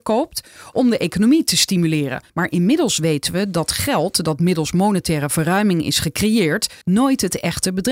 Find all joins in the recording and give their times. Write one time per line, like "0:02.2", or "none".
0:02.3
0:06.8